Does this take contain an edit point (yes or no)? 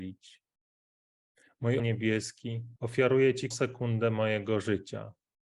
yes